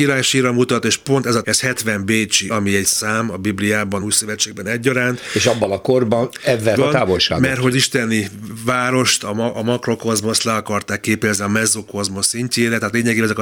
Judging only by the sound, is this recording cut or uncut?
cut